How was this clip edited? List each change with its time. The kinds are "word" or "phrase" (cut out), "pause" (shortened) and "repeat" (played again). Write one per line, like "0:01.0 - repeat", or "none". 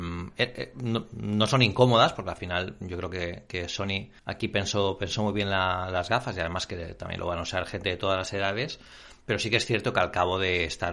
0:04.2 - pause